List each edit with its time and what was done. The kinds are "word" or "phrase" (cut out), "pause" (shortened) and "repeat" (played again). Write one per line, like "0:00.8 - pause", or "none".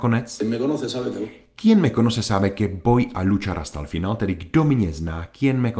none